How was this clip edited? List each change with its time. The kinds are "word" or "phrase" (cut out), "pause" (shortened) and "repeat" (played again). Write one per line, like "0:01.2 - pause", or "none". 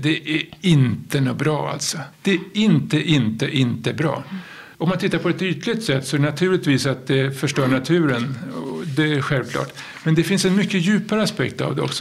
0:02.1 - pause